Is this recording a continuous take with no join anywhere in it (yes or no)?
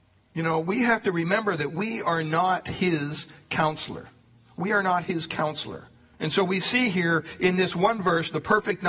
yes